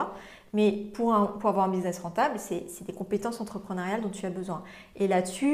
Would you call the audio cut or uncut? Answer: uncut